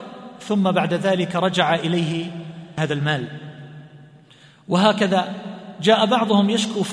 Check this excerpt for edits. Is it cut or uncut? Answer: uncut